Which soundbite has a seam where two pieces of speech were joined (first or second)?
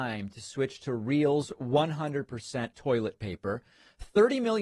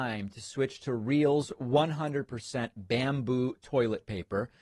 first